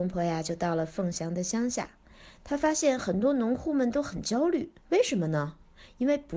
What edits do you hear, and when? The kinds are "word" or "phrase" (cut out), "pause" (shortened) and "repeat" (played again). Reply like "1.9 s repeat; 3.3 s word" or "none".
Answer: 4.8 s pause